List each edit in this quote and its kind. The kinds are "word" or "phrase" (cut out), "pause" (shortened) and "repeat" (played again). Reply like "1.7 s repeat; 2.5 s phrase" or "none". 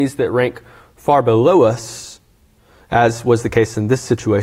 none